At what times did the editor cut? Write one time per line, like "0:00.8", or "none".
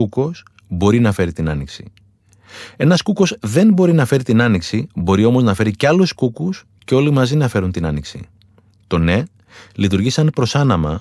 none